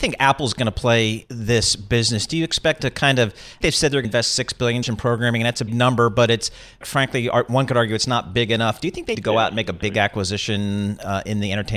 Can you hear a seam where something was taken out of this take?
yes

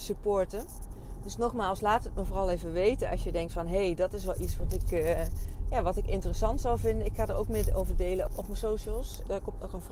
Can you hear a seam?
no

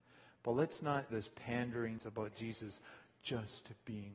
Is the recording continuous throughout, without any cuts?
no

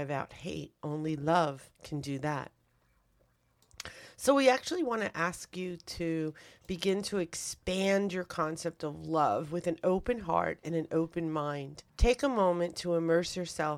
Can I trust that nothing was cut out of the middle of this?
no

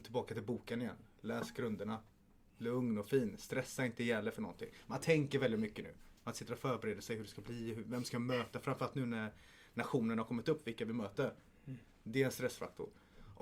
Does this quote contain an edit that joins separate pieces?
no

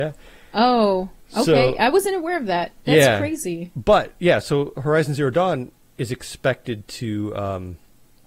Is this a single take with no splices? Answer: yes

